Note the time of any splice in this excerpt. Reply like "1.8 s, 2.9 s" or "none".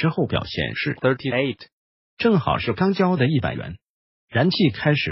1.0 s